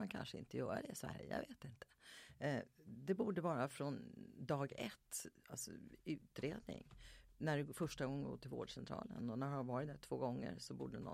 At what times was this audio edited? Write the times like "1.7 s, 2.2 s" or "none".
none